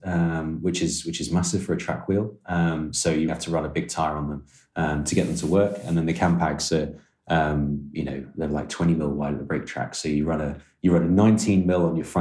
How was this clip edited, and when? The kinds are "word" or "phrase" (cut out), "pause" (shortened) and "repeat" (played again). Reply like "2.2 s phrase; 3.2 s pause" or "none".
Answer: 3.3 s word